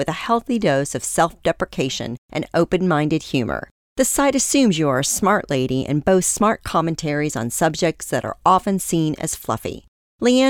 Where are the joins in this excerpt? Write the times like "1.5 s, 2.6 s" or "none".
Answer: none